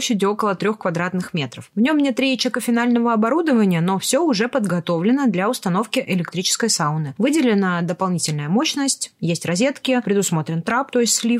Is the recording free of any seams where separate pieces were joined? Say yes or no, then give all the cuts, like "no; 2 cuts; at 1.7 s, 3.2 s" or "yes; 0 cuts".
yes; 0 cuts